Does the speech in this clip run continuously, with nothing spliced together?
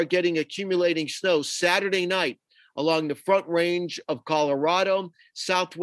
yes; 0 cuts

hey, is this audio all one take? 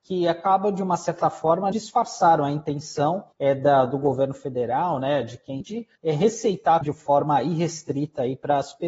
no; 5 cuts; at 1.7 s, 3.3 s, 5.6 s, 6.0 s, 6.8 s

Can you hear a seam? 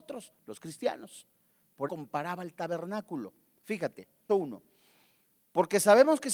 yes; 2 cuts; at 1.9 s, 4.3 s

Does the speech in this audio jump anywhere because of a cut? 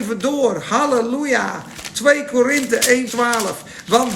yes; 1 cut; at 3.1 s

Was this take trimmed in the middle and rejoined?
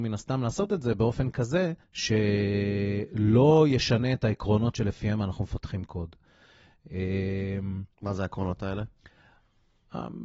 yes; 2 cuts; at 1.8 s, 7.9 s

